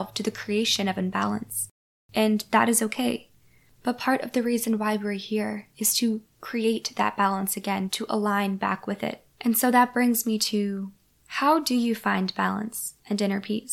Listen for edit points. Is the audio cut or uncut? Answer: cut